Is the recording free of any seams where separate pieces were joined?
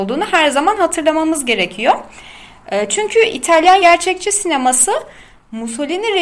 no; 1 cut; at 3.8 s

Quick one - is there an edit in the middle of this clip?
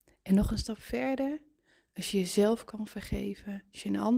no; 0 cuts

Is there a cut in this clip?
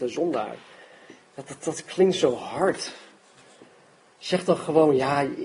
no; 0 cuts

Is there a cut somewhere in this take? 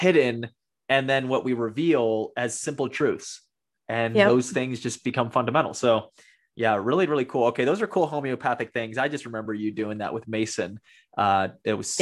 no; 0 cuts

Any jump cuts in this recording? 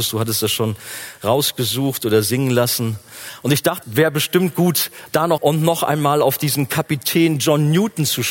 yes; 2 cuts; at 3.8 s, 5.4 s

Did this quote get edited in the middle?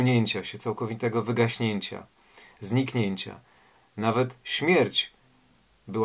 no; 0 cuts

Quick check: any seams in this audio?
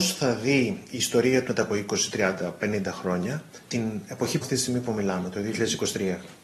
yes; 3 cuts; at 1.5 s, 3.6 s, 4.4 s

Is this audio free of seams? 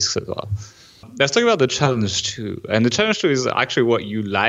yes; 0 cuts

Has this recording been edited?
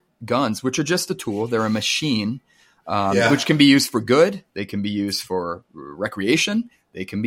no; 0 cuts

